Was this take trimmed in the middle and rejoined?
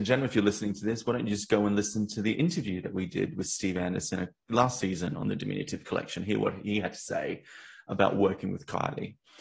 no; 0 cuts

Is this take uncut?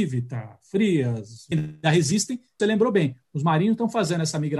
no; 2 cuts; at 1.5 s, 2.6 s

